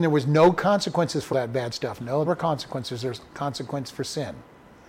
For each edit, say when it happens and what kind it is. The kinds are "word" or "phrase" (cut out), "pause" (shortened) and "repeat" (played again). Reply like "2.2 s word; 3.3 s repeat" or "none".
1.3 s word; 2.3 s word; 3.3 s word